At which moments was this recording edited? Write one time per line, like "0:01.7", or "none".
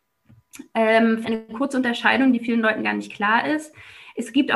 0:01.2